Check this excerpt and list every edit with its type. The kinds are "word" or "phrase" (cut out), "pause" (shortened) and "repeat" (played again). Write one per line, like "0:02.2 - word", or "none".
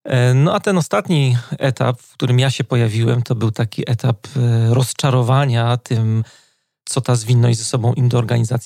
none